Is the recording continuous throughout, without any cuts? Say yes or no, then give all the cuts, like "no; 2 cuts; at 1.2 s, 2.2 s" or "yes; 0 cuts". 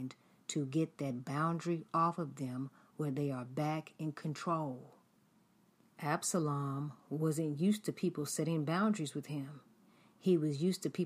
yes; 0 cuts